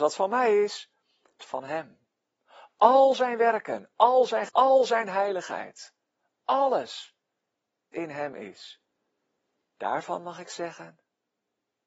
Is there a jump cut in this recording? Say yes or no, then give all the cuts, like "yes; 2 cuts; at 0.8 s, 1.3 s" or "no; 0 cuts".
yes; 3 cuts; at 1.4 s, 4.5 s, 7.9 s